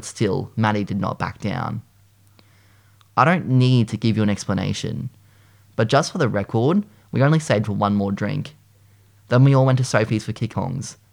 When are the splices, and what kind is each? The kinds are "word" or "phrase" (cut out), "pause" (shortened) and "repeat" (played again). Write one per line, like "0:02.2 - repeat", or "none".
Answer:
none